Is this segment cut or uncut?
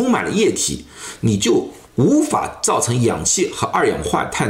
cut